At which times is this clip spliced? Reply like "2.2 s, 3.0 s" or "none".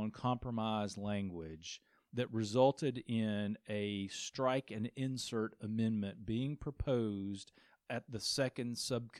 none